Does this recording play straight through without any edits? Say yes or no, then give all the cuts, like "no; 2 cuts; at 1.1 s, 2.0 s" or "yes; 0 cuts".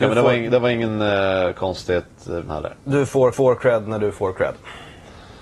no; 2 cuts; at 2.5 s, 3.3 s